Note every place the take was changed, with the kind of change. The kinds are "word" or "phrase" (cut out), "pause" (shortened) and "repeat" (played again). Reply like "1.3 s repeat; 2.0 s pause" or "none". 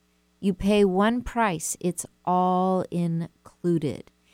none